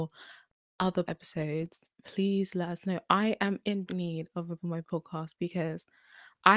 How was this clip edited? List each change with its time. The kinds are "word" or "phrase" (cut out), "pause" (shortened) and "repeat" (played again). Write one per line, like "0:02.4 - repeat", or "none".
0:01.1 - word
0:01.9 - pause
0:03.9 - word
0:04.6 - word